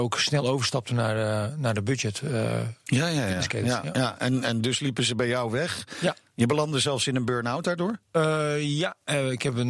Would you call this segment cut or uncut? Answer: cut